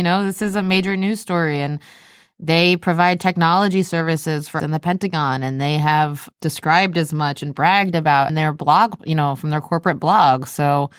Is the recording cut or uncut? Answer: cut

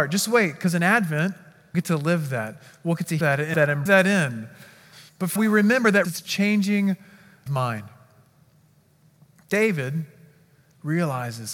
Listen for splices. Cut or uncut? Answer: cut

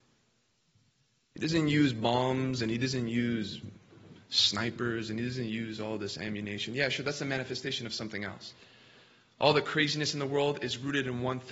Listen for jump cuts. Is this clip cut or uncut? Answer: uncut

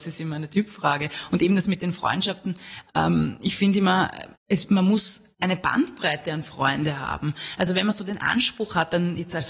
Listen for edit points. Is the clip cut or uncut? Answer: cut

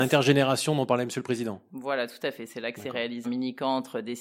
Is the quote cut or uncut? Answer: cut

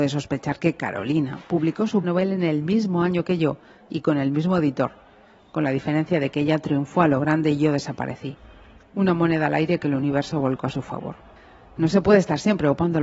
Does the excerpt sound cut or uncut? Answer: cut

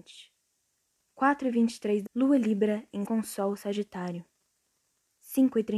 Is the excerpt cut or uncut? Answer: cut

